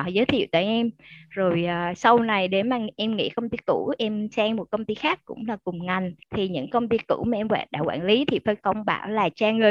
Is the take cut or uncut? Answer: cut